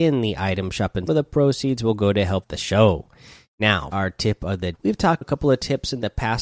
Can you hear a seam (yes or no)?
yes